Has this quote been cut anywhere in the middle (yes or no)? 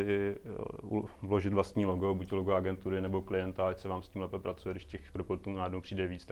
no